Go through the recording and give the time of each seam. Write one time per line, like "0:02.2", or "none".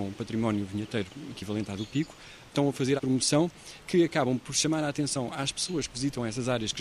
0:03.0